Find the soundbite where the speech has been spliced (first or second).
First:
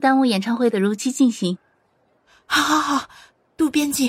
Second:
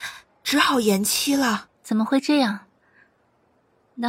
second